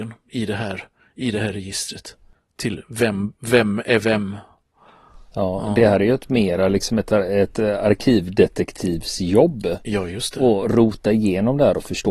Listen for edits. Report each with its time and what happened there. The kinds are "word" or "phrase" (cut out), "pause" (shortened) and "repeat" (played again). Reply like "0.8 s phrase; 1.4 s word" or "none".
none